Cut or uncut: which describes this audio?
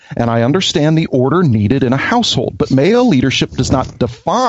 uncut